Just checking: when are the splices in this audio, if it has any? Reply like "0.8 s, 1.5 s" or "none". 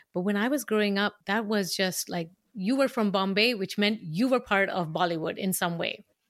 1.2 s